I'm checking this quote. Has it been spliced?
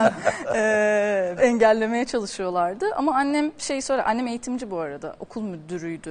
yes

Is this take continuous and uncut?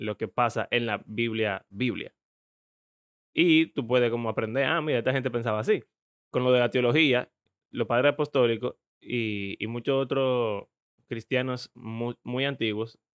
yes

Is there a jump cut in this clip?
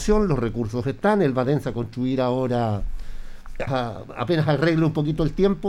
yes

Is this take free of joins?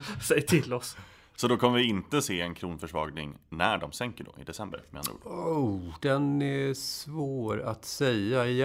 yes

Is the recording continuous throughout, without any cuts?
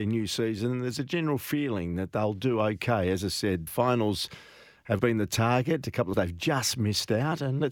no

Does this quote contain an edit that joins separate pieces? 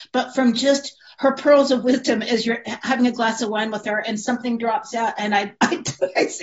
no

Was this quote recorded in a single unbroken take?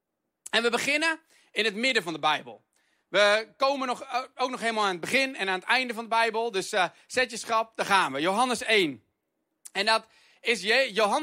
yes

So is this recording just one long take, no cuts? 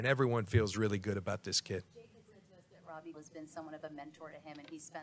no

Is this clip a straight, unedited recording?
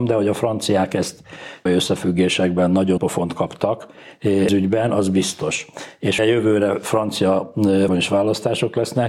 no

